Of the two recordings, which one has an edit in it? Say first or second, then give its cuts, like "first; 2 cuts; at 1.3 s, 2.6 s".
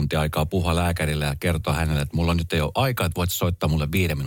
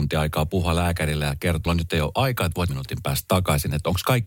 second; 2 cuts; at 1.7 s, 2.7 s